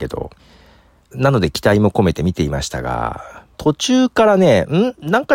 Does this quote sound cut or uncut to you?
cut